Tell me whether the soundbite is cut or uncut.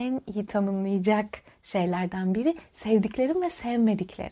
uncut